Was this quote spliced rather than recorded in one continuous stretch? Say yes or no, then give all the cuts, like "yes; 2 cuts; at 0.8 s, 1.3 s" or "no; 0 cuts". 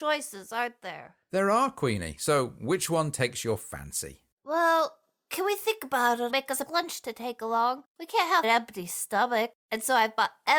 yes; 5 cuts; at 4.3 s, 6.3 s, 6.7 s, 7.9 s, 8.4 s